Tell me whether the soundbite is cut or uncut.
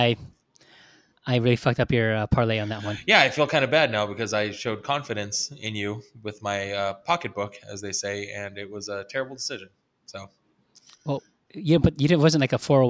uncut